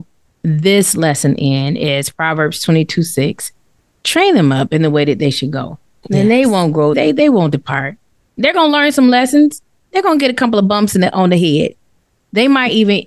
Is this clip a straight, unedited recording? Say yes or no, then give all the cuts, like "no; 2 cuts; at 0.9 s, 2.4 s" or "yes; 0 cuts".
yes; 0 cuts